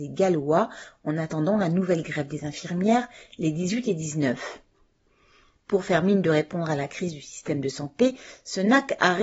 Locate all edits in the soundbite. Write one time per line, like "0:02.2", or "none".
none